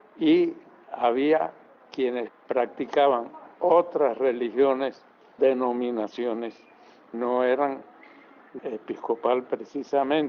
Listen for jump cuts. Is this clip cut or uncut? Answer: cut